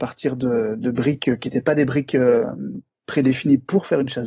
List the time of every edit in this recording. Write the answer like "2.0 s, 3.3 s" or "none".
none